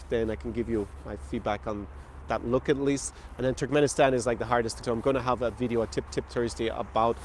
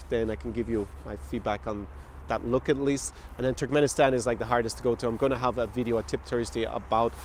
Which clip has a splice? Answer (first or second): first